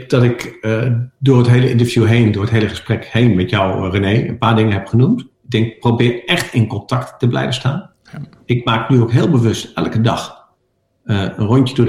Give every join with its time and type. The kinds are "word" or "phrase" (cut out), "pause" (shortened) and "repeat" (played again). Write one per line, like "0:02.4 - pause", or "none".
0:05.3 - pause